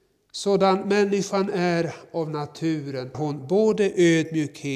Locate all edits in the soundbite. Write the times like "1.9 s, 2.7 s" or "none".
3.1 s

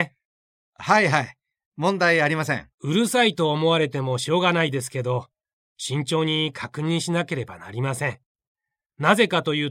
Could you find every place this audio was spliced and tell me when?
2.7 s

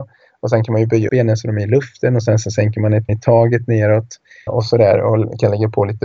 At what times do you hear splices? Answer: 1.1 s, 3.1 s, 4.5 s

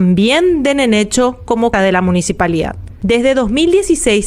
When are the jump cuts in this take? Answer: 1.7 s

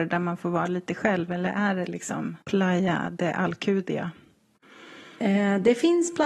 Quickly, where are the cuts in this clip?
2.4 s

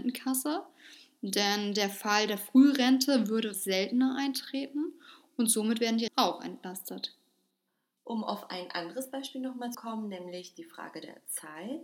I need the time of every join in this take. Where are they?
3.5 s, 6.1 s, 9.7 s

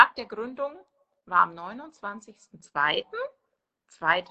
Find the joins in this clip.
none

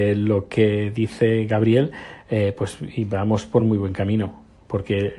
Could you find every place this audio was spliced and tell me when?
none

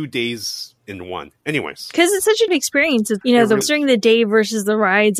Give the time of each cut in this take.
2.5 s, 3.2 s, 3.6 s

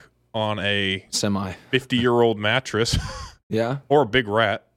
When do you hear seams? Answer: none

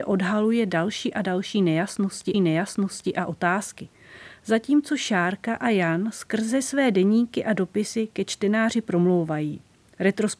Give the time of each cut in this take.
2.3 s

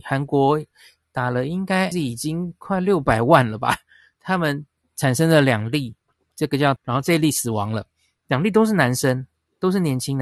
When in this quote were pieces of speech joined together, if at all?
1.9 s, 6.8 s

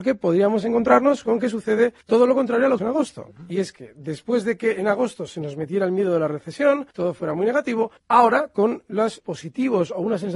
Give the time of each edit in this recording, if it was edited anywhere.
2.0 s, 2.8 s, 6.9 s, 8.0 s, 9.2 s

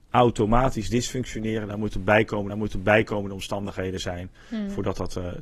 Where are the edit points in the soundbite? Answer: 2.5 s

